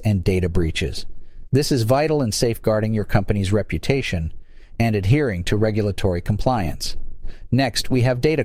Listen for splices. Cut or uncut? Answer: uncut